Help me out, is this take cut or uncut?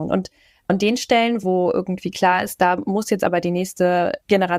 uncut